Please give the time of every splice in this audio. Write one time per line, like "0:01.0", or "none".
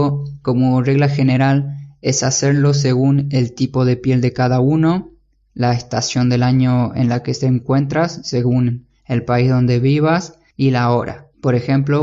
none